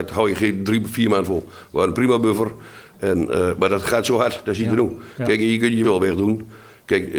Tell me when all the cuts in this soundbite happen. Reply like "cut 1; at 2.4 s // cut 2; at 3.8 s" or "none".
cut 1; at 5.8 s